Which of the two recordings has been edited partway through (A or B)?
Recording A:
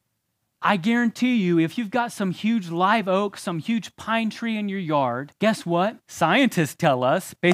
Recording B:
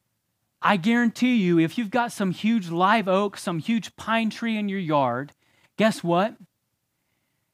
A